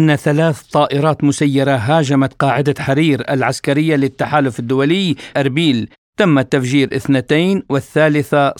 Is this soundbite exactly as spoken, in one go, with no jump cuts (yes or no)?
no